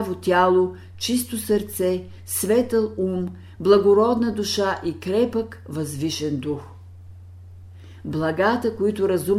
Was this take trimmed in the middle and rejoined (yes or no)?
no